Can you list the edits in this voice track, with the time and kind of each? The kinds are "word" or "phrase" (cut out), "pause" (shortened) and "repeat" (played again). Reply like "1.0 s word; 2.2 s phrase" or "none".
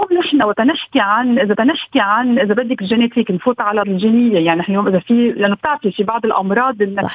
1.6 s repeat; 3.8 s word